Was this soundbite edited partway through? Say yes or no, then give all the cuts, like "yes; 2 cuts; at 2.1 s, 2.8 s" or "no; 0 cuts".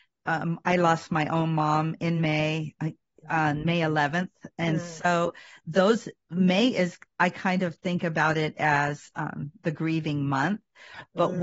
no; 0 cuts